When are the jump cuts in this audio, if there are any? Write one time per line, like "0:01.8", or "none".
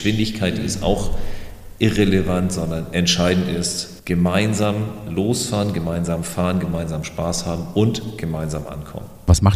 none